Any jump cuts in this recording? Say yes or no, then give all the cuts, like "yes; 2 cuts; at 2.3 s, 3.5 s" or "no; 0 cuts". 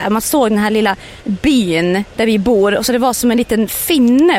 no; 0 cuts